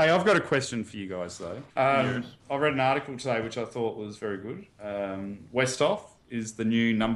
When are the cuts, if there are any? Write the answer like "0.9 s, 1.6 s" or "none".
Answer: 1.7 s, 2.4 s, 4.7 s